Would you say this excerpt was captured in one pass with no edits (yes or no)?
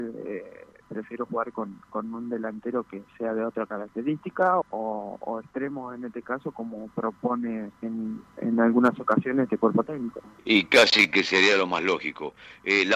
no